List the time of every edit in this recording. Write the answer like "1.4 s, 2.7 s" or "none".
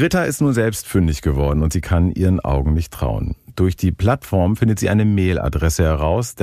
none